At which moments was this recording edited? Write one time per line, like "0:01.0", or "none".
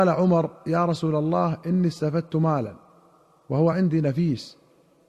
none